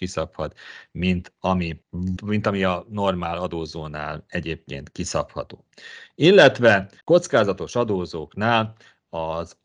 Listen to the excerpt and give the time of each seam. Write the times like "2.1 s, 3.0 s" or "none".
2.2 s, 7.0 s